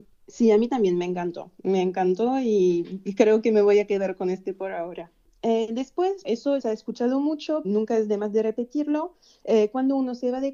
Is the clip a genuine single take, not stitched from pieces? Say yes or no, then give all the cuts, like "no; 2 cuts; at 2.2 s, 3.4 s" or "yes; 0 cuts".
no; 3 cuts; at 6.2 s, 6.6 s, 7.6 s